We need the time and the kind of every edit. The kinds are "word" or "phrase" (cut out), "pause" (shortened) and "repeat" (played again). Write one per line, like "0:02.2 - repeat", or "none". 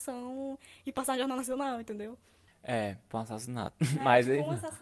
0:03.1 - word